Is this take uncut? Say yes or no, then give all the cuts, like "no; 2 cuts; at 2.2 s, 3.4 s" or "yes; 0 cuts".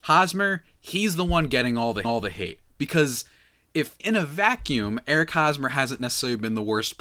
no; 2 cuts; at 2.0 s, 4.0 s